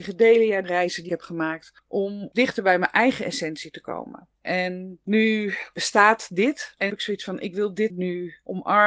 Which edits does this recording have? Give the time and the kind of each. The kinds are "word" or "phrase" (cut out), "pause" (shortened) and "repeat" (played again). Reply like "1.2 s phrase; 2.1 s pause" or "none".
1.1 s word; 4.3 s pause; 6.9 s word; 7.9 s word